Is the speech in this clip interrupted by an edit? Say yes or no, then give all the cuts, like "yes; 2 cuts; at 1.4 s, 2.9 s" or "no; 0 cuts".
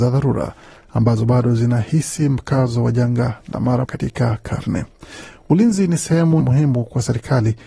yes; 2 cuts; at 3.8 s, 6.4 s